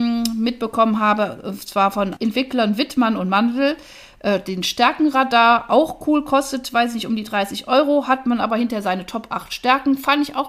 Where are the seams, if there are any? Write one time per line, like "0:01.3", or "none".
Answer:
0:02.2